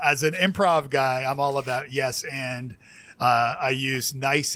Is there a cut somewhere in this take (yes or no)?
no